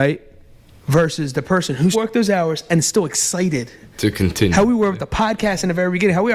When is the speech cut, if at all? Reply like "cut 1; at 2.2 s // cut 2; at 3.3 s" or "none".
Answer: cut 1; at 1.9 s // cut 2; at 3.9 s